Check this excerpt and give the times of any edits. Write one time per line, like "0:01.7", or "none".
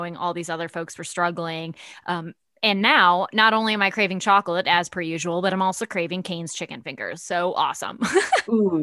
none